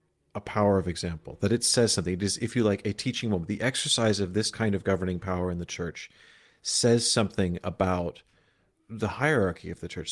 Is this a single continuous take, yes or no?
yes